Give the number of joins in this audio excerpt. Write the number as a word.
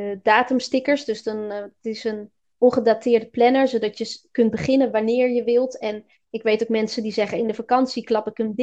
zero